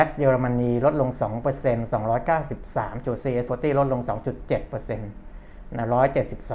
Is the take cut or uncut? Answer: cut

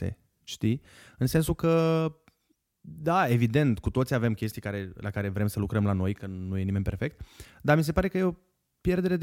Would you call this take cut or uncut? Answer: uncut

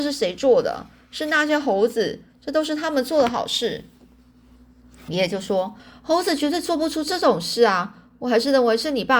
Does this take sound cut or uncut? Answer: cut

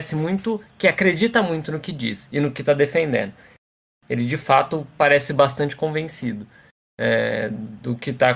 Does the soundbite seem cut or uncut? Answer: uncut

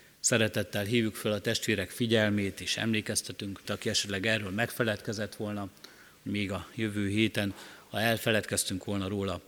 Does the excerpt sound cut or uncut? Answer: cut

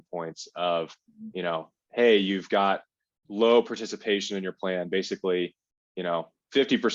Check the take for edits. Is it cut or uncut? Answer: uncut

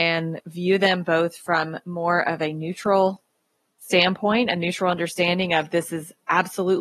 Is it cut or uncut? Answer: uncut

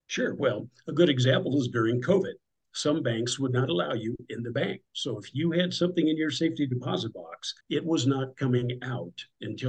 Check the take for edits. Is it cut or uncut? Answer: cut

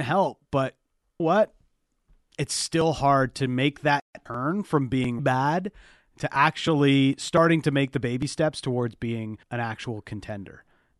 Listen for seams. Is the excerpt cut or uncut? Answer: cut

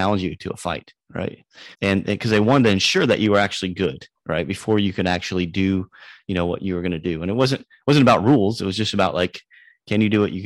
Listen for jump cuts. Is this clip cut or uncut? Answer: cut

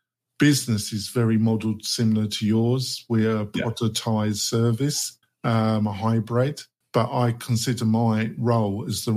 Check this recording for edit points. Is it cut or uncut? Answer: cut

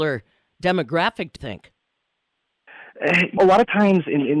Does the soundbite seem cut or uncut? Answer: cut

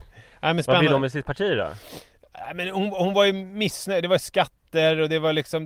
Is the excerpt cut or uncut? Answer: uncut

